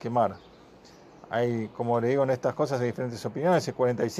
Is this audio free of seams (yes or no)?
yes